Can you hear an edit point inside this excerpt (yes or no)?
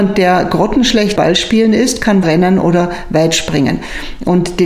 yes